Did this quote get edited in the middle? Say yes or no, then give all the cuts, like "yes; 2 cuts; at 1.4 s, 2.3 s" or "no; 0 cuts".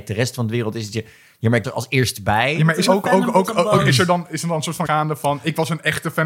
yes; 3 cuts; at 1.6 s, 2.9 s, 4.9 s